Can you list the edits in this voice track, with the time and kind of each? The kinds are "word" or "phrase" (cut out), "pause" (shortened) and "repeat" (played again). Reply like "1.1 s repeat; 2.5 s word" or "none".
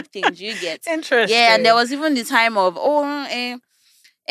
none